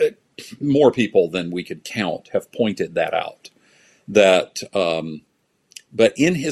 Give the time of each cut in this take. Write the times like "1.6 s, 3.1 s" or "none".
none